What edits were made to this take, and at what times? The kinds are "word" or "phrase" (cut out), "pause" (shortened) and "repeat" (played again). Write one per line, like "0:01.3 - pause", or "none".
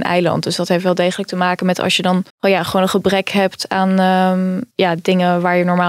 0:02.3 - pause
0:04.7 - pause